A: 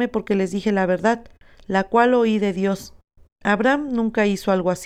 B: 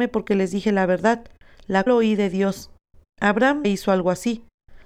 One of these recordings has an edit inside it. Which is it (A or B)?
B